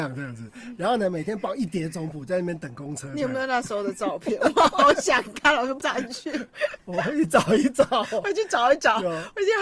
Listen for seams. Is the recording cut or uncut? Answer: cut